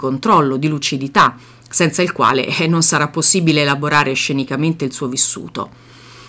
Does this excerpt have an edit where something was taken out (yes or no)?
no